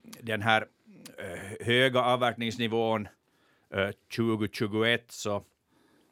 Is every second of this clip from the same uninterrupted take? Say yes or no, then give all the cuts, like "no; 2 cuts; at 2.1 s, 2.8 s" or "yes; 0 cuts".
yes; 0 cuts